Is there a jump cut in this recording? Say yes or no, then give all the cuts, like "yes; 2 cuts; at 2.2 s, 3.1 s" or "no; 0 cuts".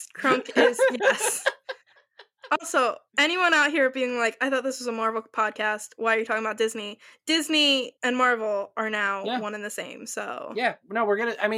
yes; 2 cuts; at 3.1 s, 8.0 s